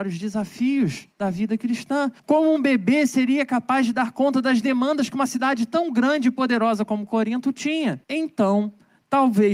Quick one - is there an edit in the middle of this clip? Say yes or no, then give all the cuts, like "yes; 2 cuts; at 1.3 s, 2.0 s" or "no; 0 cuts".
yes; 3 cuts; at 1.1 s, 2.2 s, 8.0 s